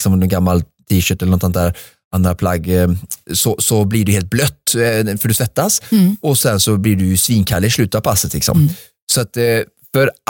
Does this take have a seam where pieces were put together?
no; 0 cuts

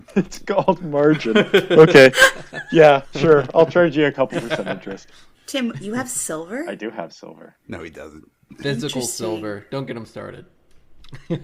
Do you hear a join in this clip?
yes; 1 cut; at 5.3 s

